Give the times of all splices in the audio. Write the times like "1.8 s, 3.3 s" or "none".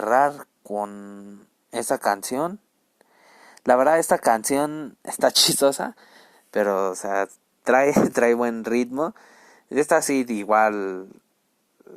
none